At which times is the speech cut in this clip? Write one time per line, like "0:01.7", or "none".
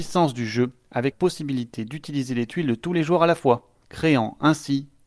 0:01.1